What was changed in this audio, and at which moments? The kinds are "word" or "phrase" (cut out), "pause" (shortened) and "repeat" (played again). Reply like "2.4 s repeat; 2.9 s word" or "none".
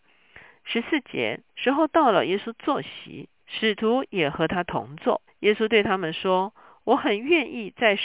1.5 s pause; 3.4 s pause; 5.3 s pause